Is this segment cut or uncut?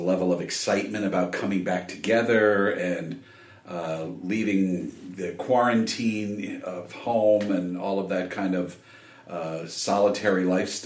uncut